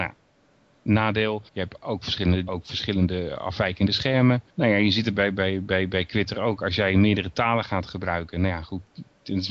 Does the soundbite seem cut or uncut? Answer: cut